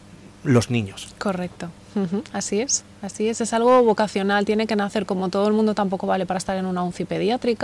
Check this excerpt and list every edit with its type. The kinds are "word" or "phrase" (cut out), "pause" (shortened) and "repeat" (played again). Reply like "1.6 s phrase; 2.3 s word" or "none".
none